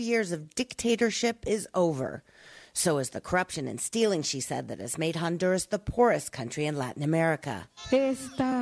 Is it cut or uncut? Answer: uncut